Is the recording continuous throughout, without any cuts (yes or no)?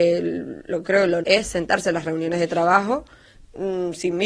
no